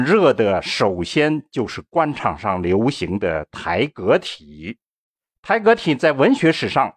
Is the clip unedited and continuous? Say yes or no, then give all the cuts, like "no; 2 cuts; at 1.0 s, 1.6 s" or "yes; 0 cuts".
no; 1 cut; at 5.2 s